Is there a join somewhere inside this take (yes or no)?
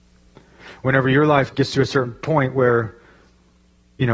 yes